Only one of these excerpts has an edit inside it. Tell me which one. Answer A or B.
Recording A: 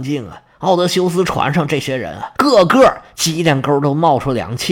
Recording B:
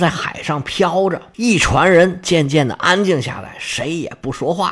A